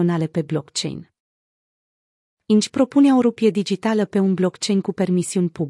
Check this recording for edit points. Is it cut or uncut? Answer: uncut